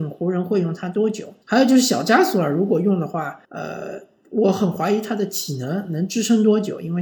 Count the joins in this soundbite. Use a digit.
2